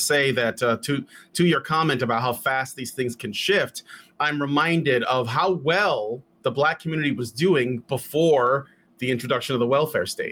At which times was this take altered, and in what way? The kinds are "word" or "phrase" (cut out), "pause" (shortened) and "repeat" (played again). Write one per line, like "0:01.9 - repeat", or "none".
none